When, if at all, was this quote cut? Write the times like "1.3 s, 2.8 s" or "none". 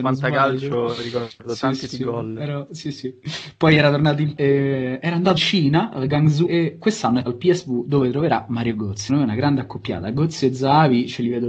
1.9 s, 2.8 s, 4.4 s, 5.4 s, 5.9 s, 6.5 s, 7.3 s, 9.1 s